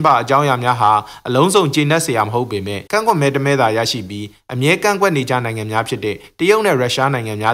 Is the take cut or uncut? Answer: cut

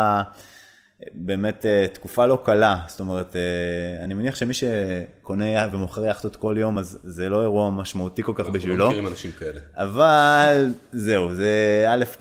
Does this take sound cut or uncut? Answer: uncut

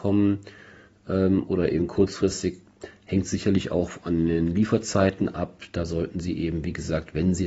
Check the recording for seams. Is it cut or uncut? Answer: uncut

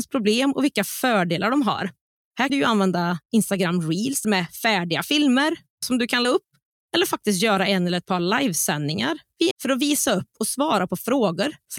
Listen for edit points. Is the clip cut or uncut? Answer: cut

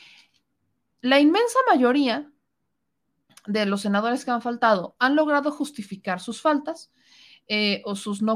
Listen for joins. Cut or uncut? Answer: uncut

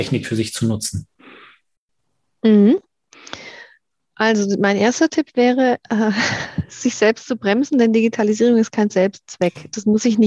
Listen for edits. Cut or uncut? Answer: cut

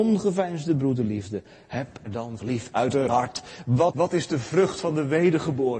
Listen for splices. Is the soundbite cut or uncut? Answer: cut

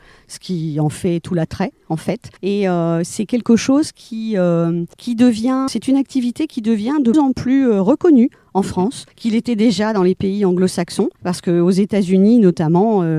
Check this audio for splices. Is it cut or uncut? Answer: cut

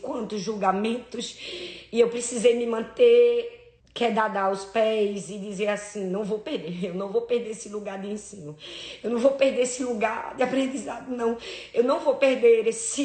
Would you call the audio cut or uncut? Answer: cut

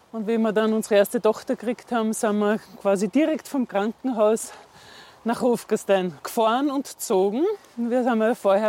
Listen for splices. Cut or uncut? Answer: cut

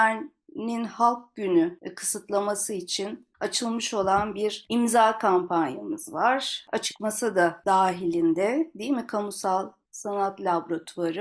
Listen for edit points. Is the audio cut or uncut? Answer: cut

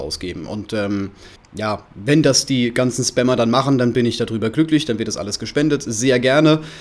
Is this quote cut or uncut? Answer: cut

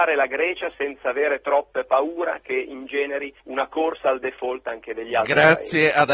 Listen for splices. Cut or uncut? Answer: cut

